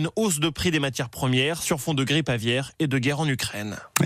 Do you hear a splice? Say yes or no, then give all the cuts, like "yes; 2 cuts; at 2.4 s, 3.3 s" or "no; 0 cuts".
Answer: no; 0 cuts